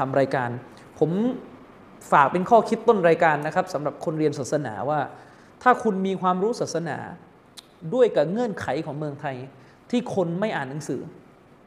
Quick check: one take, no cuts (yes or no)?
yes